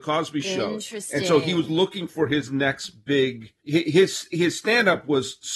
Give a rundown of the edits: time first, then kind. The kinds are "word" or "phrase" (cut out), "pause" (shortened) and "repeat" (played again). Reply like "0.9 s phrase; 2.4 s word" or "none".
3.6 s pause